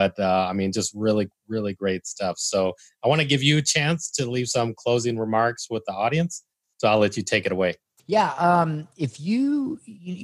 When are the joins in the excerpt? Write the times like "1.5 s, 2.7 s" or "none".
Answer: none